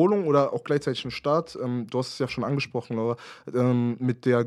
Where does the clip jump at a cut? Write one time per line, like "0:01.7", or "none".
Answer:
0:02.3